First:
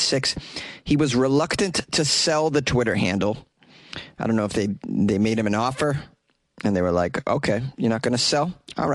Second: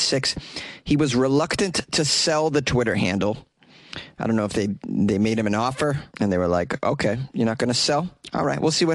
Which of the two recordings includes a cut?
second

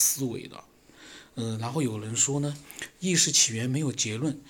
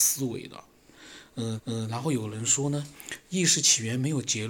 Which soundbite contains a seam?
second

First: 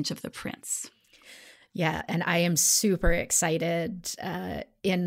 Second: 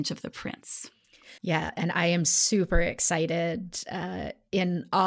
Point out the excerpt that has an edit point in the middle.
second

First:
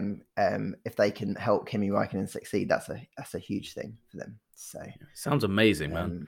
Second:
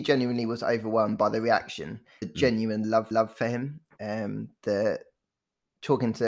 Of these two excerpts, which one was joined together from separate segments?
second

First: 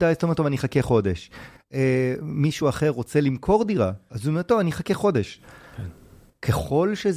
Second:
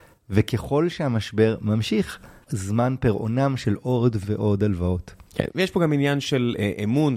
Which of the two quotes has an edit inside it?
second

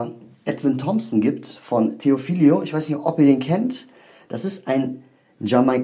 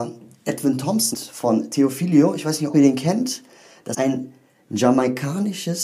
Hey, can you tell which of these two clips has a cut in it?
second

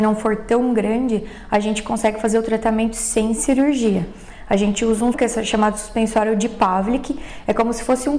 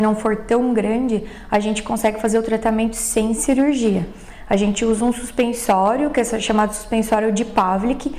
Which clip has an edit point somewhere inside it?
first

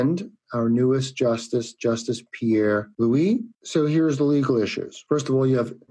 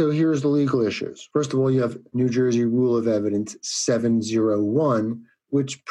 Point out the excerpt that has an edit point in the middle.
first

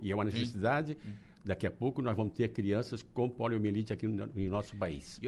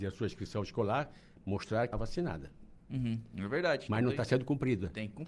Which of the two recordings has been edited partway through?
second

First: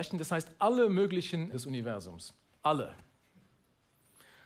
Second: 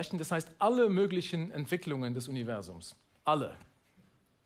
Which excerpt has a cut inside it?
first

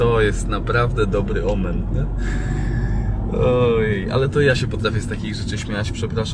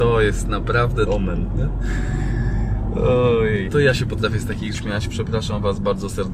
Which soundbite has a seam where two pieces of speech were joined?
second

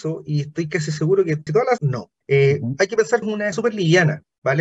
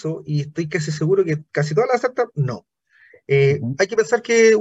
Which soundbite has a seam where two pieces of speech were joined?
first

